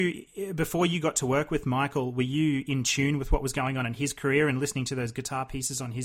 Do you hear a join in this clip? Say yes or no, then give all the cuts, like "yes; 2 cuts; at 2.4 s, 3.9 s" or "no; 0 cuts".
no; 0 cuts